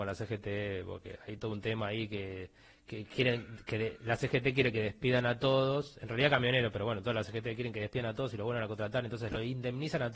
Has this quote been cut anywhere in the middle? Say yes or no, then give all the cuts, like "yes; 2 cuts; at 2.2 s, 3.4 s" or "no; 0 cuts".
no; 0 cuts